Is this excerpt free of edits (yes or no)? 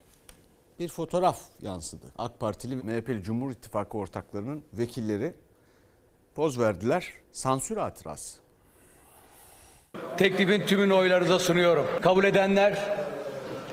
no